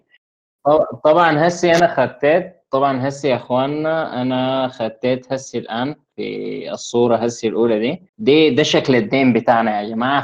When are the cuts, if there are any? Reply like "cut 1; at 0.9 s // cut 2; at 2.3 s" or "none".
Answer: cut 1; at 8.1 s